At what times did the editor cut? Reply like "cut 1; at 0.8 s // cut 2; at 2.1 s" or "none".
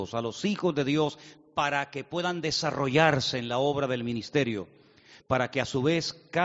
none